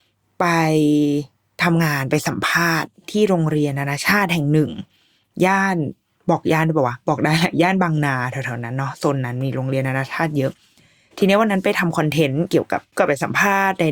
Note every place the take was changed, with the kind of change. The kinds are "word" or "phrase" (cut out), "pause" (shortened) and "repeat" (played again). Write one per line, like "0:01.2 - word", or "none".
none